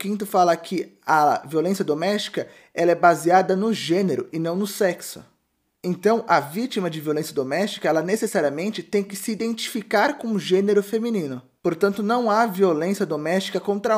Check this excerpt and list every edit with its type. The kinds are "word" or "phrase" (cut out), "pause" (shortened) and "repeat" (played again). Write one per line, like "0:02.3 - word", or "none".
none